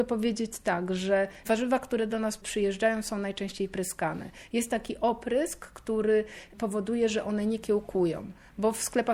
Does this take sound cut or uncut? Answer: uncut